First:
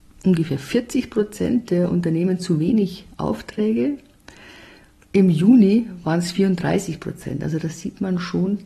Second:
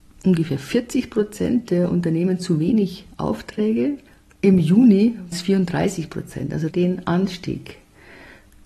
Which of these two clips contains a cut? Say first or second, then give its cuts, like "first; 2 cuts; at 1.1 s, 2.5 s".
second; 3 cuts; at 4.1 s, 5.3 s, 6.7 s